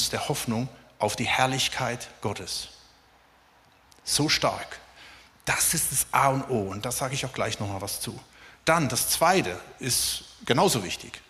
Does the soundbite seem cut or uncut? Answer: uncut